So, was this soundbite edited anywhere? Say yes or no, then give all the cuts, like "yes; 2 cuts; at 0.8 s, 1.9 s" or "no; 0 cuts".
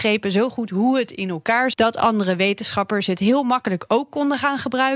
yes; 1 cut; at 1.7 s